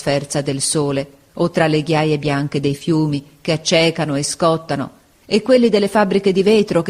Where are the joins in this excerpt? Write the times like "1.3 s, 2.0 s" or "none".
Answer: none